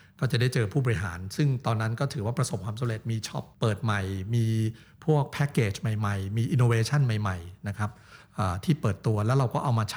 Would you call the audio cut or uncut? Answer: cut